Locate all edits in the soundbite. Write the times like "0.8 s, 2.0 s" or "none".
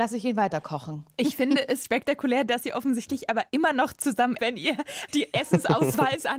1.8 s, 4.4 s, 5.1 s